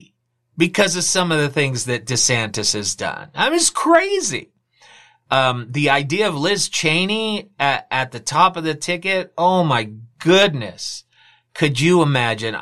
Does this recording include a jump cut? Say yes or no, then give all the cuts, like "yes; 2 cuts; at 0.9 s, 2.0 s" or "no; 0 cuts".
no; 0 cuts